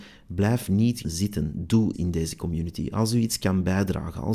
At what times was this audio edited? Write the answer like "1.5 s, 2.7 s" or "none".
1.0 s, 1.9 s

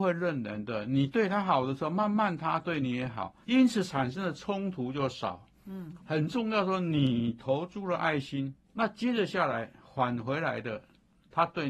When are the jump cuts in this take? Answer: 3.4 s, 6.0 s, 8.6 s

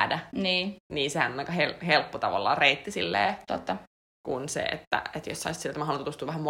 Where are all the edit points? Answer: none

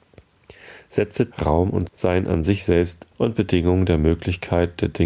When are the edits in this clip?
1.3 s, 1.9 s, 3.1 s

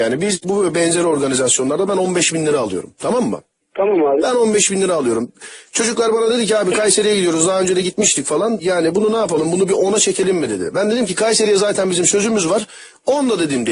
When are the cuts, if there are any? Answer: none

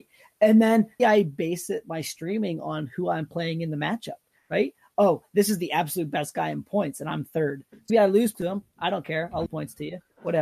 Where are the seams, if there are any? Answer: 1.0 s, 7.9 s, 8.3 s, 9.5 s

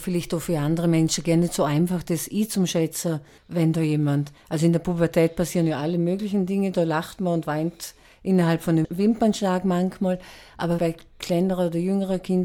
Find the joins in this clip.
10.8 s

